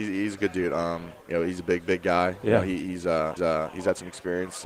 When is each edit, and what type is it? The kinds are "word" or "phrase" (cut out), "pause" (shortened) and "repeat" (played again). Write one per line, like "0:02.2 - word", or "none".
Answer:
0:03.4 - repeat